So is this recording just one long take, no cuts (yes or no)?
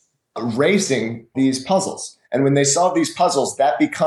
no